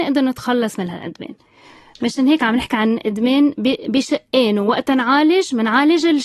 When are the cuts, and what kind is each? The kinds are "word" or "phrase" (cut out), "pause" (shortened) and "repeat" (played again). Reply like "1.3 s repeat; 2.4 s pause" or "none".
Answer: none